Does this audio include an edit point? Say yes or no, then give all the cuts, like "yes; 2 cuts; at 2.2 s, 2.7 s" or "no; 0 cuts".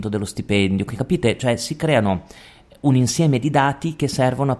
no; 0 cuts